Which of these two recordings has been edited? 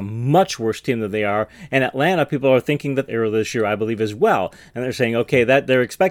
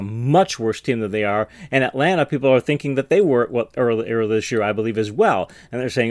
first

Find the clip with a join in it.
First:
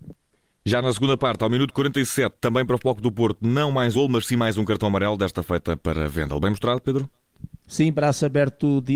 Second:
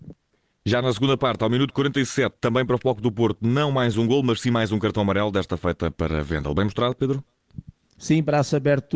first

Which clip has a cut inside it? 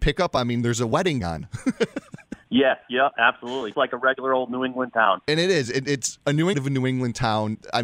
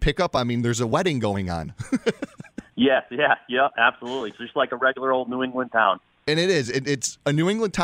first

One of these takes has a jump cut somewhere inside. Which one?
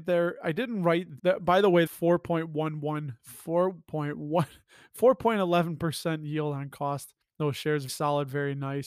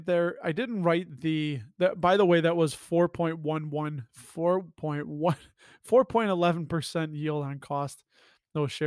first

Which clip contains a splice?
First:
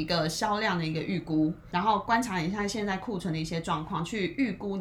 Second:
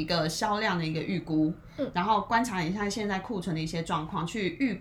first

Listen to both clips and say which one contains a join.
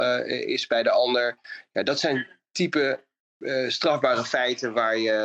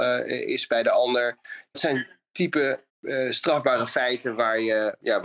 second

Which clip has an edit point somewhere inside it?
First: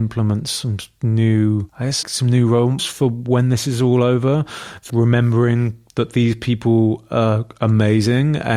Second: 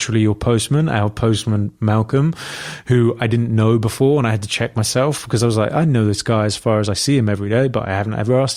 first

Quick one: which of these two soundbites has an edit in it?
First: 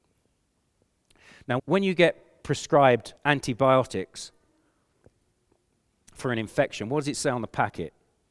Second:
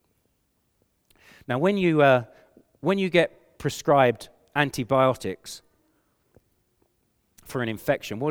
first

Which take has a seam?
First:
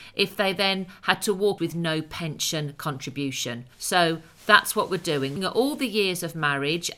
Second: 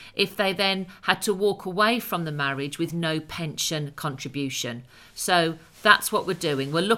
first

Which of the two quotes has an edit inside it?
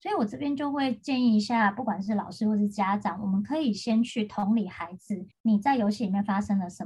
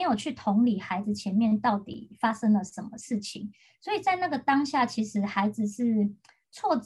first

